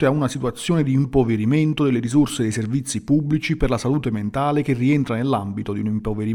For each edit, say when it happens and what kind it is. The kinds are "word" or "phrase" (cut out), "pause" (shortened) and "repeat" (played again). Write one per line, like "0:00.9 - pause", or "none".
none